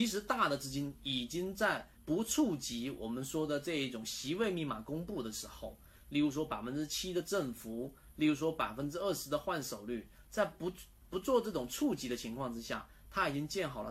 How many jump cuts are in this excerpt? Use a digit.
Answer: 1